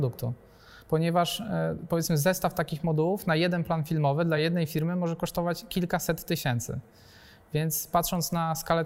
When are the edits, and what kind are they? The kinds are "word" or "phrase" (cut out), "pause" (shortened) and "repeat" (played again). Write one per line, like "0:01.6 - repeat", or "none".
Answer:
none